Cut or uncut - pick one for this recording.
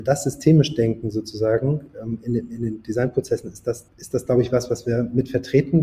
cut